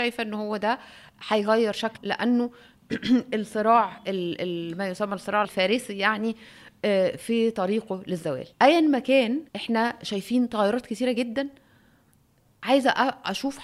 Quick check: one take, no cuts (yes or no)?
no